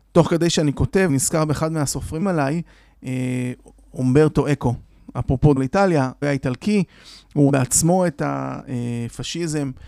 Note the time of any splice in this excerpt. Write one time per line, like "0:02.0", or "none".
0:01.1
0:02.2
0:05.6
0:06.2
0:07.5

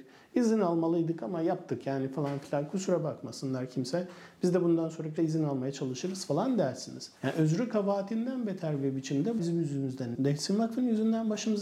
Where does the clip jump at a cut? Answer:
0:05.2
0:07.2
0:09.4
0:10.1

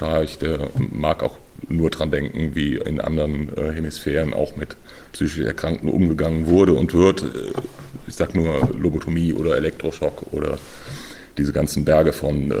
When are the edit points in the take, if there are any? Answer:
none

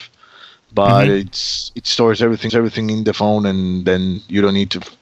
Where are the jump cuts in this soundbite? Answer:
0:02.5

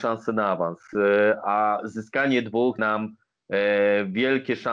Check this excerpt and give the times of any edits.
0:02.8

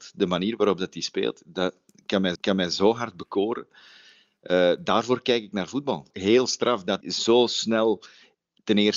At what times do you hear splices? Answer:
0:02.4
0:07.0

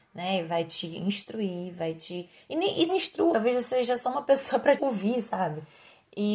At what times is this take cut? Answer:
0:02.9
0:03.3
0:04.8

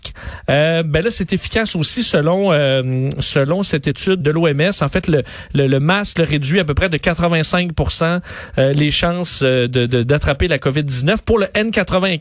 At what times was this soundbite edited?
0:04.2

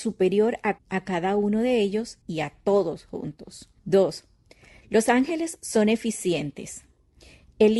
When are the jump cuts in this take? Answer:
0:02.2
0:03.8

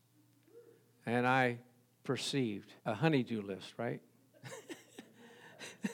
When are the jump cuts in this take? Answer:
0:02.8

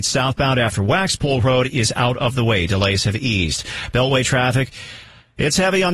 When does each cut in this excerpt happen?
none

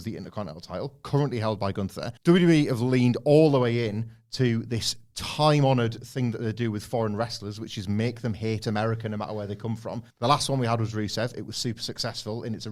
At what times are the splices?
0:02.2
0:10.1

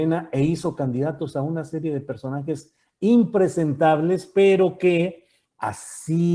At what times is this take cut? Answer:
none

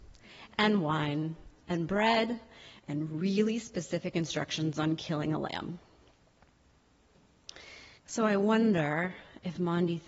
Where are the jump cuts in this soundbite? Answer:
0:08.0

